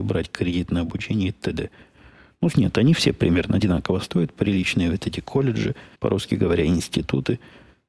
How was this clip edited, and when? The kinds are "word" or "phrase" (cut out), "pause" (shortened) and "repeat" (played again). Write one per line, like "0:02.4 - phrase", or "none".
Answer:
0:02.5 - phrase
0:05.9 - pause